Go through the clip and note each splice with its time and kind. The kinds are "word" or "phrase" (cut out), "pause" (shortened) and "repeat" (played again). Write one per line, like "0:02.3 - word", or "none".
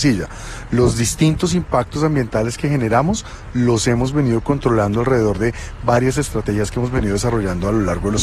none

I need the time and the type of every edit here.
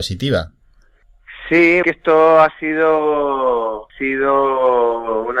0:01.8 - phrase
0:03.9 - word

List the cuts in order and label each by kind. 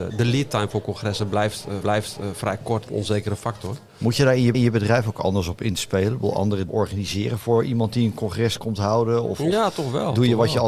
0:01.8 - repeat
0:02.9 - phrase
0:04.5 - repeat
0:06.7 - word
0:08.6 - word

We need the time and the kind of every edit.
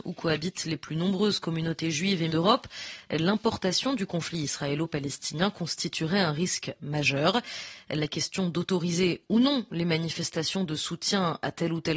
0:02.3 - word

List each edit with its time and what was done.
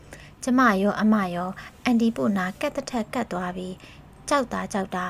none

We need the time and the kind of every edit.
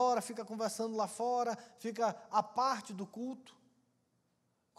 none

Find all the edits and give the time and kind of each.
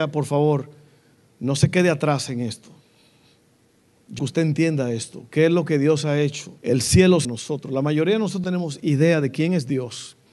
0:04.2 - word
0:06.6 - pause
0:07.2 - phrase
0:08.4 - word

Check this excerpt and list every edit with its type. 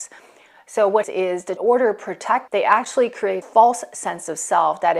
0:01.0 - word
0:01.6 - phrase
0:02.5 - word
0:03.4 - word

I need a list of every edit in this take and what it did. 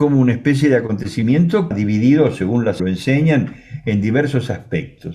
0:01.7 - phrase
0:02.8 - phrase

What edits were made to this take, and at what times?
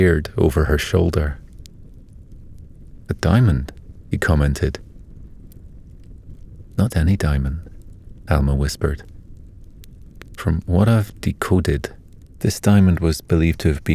0:06.9 - word

